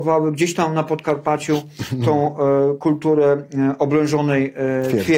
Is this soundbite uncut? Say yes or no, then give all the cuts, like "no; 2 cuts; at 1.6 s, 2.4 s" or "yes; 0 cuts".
yes; 0 cuts